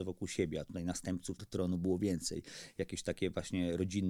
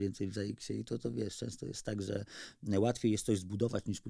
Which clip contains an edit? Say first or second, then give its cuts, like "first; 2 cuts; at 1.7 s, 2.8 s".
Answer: first; 1 cut; at 1.4 s